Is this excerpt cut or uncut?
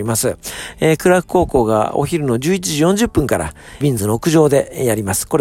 cut